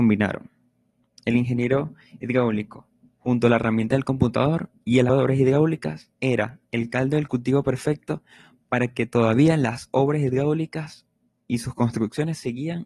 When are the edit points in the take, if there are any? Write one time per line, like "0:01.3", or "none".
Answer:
0:05.1
0:06.2